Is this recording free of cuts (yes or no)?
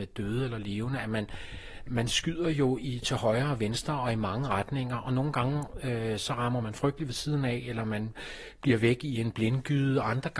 yes